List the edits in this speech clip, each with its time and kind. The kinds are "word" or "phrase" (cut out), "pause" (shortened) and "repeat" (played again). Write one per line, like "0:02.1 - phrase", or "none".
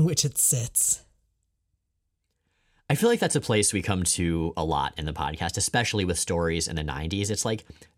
none

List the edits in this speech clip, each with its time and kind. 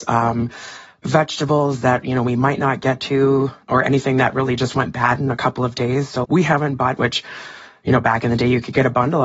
0:06.2 - word
0:07.0 - word

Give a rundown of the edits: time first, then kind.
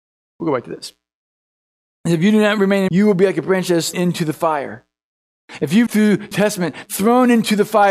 0:02.9 - word
0:03.9 - word
0:05.9 - word
0:06.3 - word
0:06.9 - word

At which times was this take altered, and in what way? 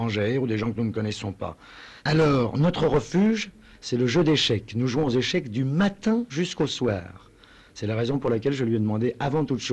0:02.0 - pause

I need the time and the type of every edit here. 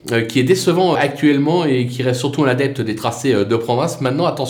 0:00.9 - word

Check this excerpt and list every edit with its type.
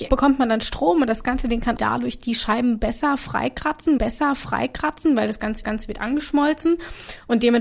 0:01.8 - phrase
0:04.0 - repeat
0:05.6 - repeat

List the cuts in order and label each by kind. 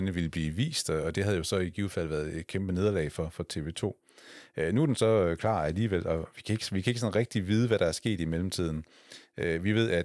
none

